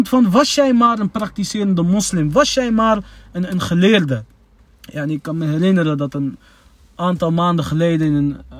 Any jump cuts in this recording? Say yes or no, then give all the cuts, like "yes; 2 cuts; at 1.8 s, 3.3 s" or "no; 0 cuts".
no; 0 cuts